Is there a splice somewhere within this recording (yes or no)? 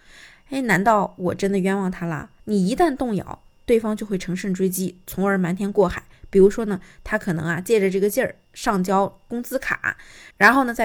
yes